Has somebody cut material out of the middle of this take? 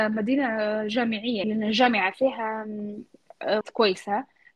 yes; 2 cuts; at 1.4 s, 3.6 s

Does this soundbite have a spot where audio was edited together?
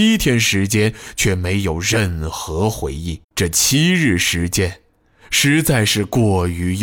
yes; 1 cut; at 3.2 s

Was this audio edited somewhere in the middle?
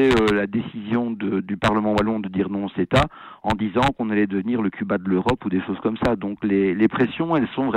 no; 0 cuts

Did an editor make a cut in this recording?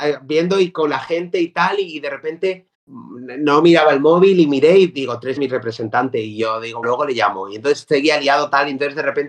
yes; 3 cuts; at 2.7 s, 5.4 s, 6.8 s

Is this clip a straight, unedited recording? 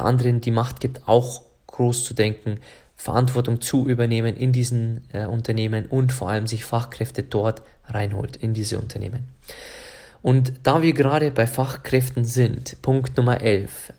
yes; 0 cuts

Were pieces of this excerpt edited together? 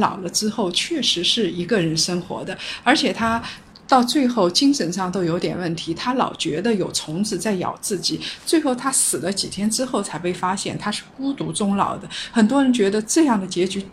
yes; 1 cut; at 3.7 s

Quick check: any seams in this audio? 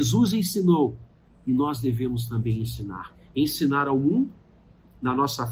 no; 0 cuts

